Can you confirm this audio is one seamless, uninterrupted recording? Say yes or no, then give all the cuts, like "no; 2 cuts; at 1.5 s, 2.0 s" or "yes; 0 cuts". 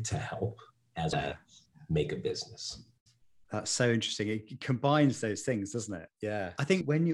no; 1 cut; at 1.1 s